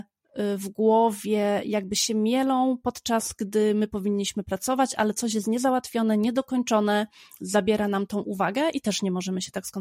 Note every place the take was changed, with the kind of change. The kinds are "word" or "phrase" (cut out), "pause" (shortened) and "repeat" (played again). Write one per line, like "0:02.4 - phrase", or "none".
none